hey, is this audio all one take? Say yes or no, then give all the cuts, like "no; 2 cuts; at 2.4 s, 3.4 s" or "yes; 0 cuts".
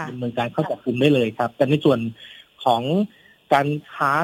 yes; 0 cuts